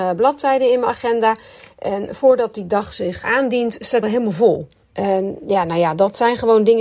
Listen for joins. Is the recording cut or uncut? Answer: cut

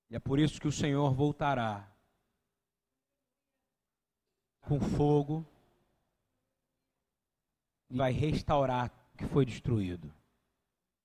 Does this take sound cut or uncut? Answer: cut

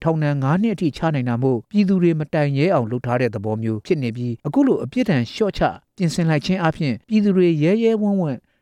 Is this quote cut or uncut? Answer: cut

